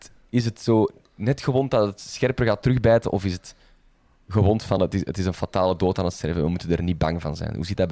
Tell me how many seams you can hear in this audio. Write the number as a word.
zero